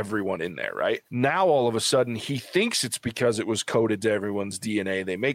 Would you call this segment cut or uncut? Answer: cut